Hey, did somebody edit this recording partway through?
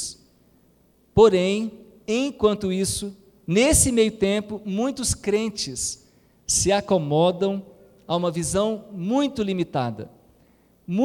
no; 0 cuts

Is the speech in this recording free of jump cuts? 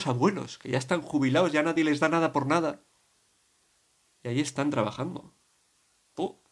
yes; 0 cuts

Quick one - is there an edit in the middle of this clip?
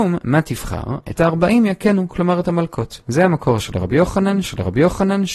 yes; 1 cut; at 4.4 s

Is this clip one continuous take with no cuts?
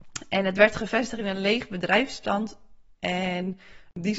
yes; 0 cuts

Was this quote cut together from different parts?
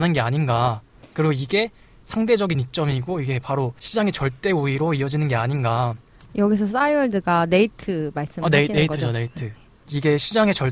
no; 0 cuts

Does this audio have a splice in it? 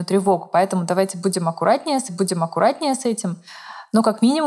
yes; 1 cut; at 2.1 s

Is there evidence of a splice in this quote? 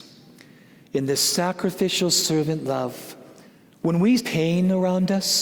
yes; 2 cuts; at 3.4 s, 4.2 s

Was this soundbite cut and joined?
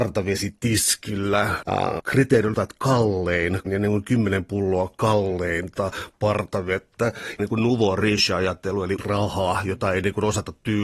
yes; 6 cuts; at 1.6 s, 2.0 s, 2.5 s, 3.7 s, 7.4 s, 9.0 s

